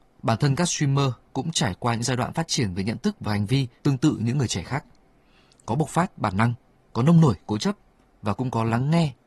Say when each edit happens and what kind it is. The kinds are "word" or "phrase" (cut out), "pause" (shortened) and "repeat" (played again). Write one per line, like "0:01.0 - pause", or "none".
0:03.8 - pause